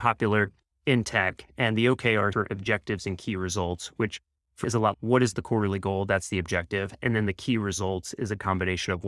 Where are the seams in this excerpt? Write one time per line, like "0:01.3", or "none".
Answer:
0:02.3
0:04.6
0:04.9